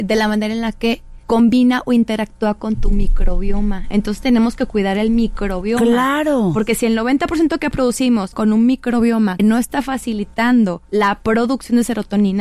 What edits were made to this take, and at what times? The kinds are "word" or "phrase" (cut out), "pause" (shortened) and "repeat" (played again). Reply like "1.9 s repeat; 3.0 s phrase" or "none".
1.2 s pause; 8.3 s word; 9.4 s word; 10.8 s pause

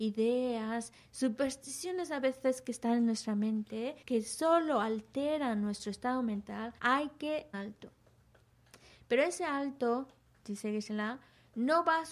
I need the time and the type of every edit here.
4.0 s pause; 6.8 s pause; 7.5 s phrase

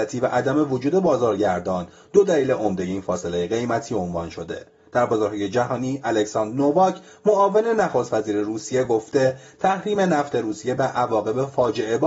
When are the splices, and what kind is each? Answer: none

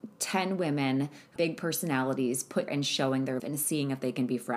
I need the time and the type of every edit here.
1.4 s word; 2.7 s word; 3.4 s word

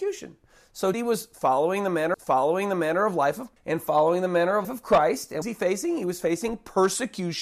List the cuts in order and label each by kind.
0.9 s word; 2.1 s repeat; 3.6 s word; 4.6 s word; 5.4 s phrase

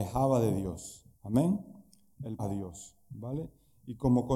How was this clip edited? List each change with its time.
1.1 s pause; 2.4 s phrase

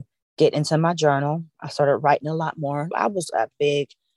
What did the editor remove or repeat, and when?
2.9 s word

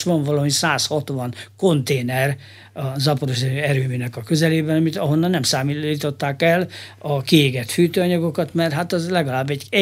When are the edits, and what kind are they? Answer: none

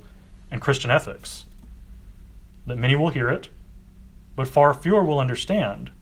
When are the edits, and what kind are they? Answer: none

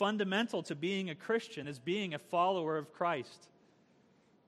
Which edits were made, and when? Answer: 1.6 s word

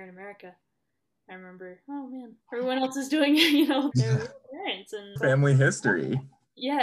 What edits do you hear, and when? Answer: 2.4 s pause; 3.9 s word; 5.2 s word

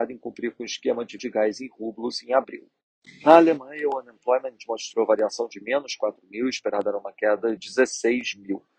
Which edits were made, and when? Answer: 1.2 s word; 4.6 s word; 7.6 s word

